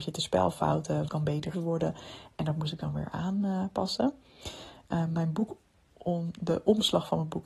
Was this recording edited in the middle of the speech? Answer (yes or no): yes